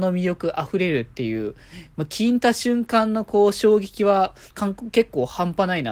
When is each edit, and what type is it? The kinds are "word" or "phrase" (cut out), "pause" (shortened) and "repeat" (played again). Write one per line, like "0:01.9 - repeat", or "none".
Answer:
0:04.5 - pause